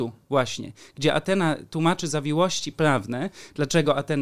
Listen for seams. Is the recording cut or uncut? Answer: uncut